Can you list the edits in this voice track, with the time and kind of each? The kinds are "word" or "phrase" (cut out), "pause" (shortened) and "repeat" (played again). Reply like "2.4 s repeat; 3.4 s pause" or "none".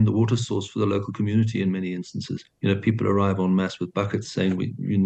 2.5 s pause